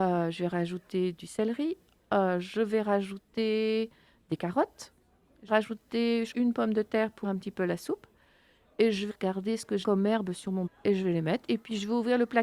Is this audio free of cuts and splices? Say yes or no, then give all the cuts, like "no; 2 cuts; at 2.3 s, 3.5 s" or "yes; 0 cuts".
no; 6 cuts; at 5.5 s, 6.3 s, 7.2 s, 9.1 s, 9.8 s, 10.7 s